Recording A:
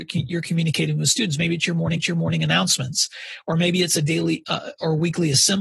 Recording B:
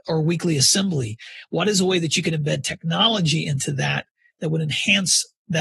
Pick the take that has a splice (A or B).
A